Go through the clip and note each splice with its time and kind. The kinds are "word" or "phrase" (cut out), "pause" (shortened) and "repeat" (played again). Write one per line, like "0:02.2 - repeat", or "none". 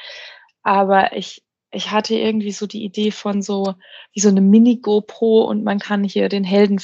none